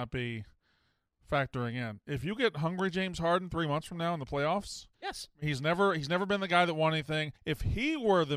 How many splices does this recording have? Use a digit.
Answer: 2